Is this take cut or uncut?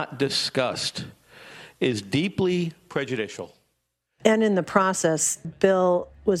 cut